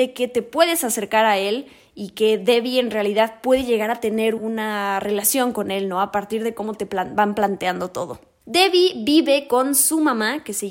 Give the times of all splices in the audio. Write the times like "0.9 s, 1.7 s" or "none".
4.4 s